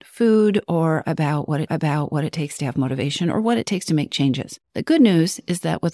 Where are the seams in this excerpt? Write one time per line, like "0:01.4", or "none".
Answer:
0:01.7
0:04.6